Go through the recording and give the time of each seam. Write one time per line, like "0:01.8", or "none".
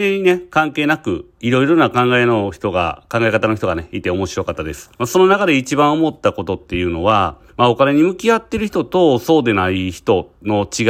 0:04.9
0:07.5